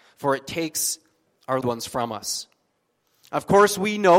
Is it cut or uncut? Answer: cut